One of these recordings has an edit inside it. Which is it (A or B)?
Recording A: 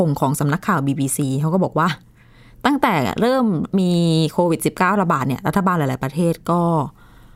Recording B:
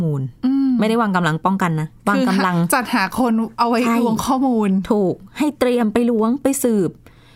B